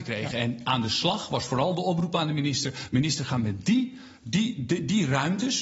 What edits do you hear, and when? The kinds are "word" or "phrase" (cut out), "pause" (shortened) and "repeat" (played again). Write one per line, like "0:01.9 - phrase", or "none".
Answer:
none